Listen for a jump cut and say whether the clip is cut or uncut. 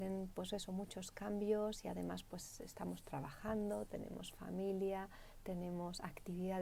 uncut